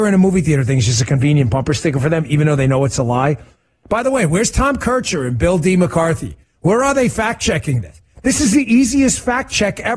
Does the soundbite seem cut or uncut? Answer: uncut